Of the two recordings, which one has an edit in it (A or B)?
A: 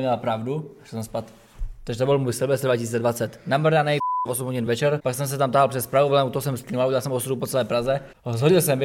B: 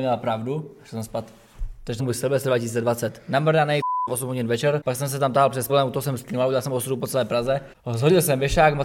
B